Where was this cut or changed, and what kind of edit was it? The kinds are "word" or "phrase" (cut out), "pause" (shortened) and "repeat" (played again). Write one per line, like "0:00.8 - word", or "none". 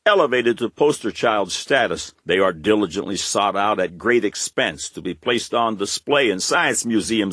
0:02.2 - pause